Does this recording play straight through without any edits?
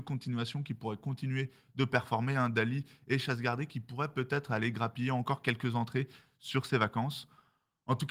yes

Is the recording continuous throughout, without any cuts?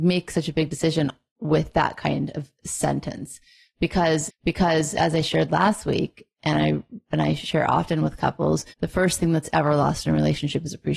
no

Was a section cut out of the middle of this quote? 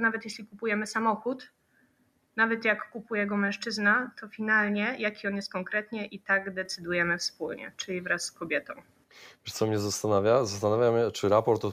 no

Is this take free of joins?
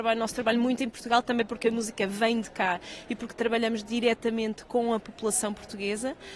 no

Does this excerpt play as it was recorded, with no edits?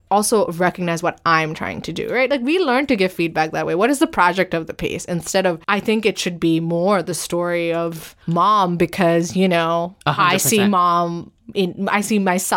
no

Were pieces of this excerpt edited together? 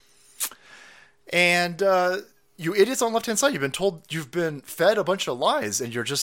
no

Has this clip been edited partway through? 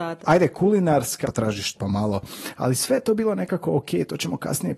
yes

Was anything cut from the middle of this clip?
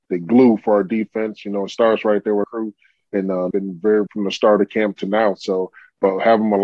yes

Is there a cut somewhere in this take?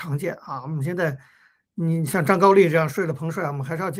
no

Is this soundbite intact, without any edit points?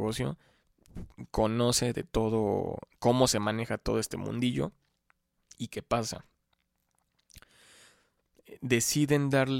yes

